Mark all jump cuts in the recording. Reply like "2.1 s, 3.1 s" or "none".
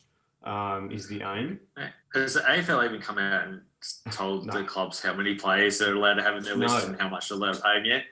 2.0 s